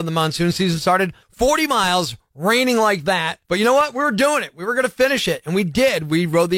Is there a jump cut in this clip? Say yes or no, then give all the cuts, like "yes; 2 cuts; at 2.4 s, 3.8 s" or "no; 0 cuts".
yes; 2 cuts; at 1.2 s, 3.4 s